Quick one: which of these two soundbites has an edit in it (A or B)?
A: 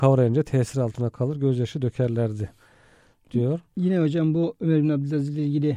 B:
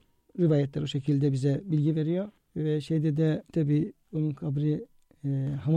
B